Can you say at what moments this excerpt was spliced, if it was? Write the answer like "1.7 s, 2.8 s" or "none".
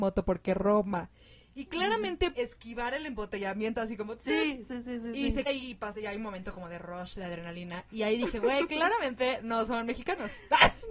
2.3 s, 4.7 s, 5.5 s